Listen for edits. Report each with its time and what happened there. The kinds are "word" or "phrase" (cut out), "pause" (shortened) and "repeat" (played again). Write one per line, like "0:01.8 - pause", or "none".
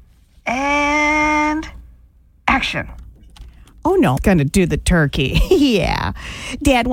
0:04.2 - word